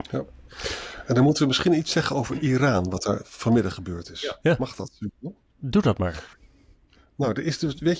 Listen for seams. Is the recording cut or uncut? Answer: uncut